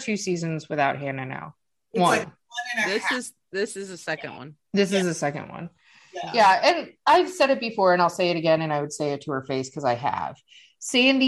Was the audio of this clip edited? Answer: no; 0 cuts

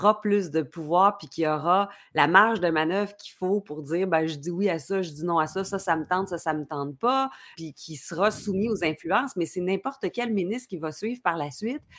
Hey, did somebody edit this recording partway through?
yes; 1 cut; at 7.5 s

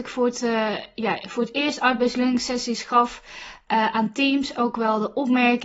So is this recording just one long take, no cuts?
yes; 0 cuts

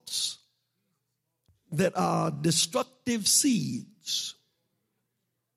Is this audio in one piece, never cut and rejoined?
yes; 0 cuts

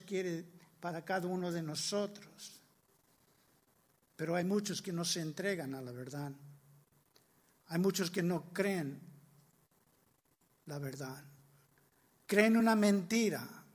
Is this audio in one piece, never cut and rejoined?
yes; 0 cuts

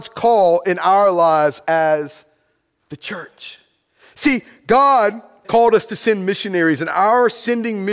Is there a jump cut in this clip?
yes; 1 cut; at 5.4 s

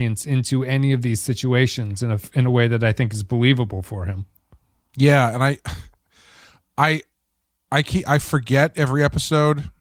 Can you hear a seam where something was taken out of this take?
no; 0 cuts

